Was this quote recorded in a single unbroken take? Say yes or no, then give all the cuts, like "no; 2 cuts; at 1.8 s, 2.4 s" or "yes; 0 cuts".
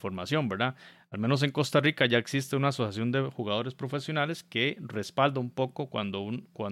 yes; 0 cuts